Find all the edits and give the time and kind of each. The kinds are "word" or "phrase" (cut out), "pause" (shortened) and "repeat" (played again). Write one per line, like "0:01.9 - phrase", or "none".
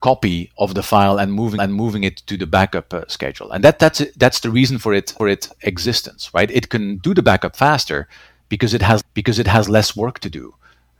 0:01.6 - repeat
0:05.2 - repeat
0:09.0 - repeat